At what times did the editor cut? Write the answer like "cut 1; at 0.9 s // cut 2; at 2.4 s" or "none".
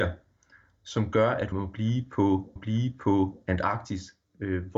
cut 1; at 1.5 s // cut 2; at 2.6 s